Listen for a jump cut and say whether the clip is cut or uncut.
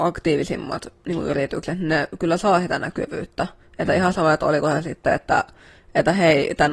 uncut